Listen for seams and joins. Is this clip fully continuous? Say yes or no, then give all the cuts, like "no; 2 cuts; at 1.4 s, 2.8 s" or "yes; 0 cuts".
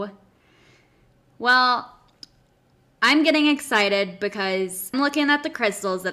no; 1 cut; at 4.9 s